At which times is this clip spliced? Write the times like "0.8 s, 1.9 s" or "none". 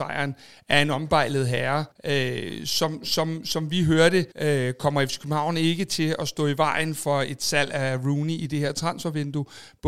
1.9 s, 4.3 s

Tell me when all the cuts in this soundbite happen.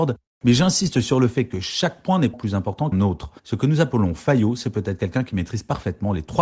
2.3 s, 2.9 s, 3.4 s

